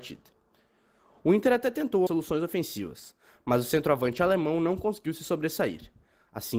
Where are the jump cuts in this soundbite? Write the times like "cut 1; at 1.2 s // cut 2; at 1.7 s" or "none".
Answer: cut 1; at 2.1 s